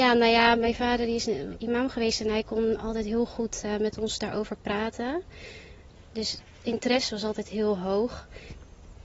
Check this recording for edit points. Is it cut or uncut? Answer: uncut